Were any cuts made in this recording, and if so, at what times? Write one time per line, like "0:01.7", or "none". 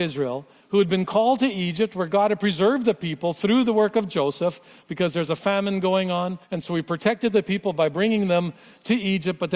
0:06.4